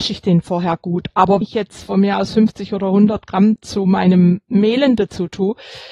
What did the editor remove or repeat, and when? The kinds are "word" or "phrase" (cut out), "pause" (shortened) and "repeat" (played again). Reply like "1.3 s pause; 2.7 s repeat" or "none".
1.4 s word